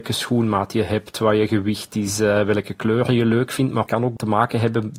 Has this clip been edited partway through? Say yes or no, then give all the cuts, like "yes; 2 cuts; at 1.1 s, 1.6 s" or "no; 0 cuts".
no; 0 cuts